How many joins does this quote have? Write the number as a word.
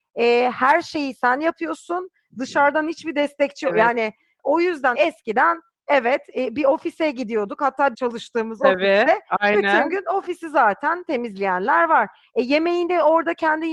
two